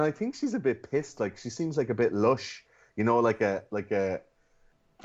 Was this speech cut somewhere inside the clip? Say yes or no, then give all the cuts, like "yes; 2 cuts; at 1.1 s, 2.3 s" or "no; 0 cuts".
no; 0 cuts